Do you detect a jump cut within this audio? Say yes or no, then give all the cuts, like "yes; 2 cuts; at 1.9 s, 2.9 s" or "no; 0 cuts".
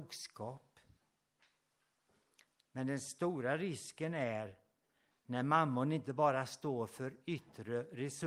no; 0 cuts